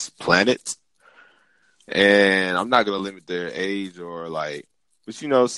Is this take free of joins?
yes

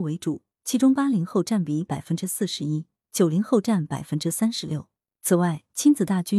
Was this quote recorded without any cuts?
yes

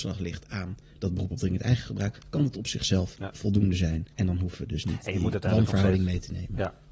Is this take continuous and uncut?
no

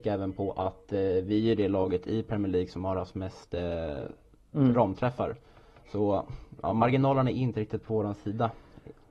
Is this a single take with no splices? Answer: yes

